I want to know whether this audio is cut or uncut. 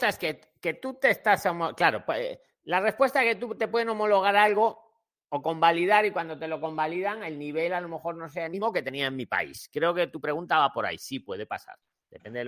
uncut